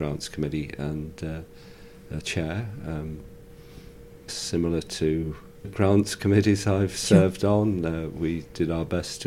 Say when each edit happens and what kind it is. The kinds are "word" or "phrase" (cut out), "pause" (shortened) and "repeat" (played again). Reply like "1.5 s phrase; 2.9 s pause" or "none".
2.2 s word; 4.3 s phrase; 5.6 s word